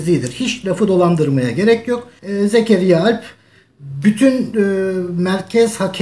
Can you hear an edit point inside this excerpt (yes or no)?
no